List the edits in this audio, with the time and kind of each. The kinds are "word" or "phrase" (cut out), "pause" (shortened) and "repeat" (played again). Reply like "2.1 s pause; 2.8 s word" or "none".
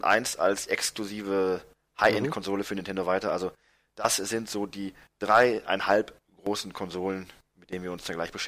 none